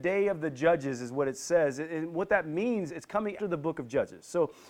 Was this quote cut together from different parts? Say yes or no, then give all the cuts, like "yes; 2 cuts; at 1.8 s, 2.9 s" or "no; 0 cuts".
yes; 2 cuts; at 2.9 s, 3.4 s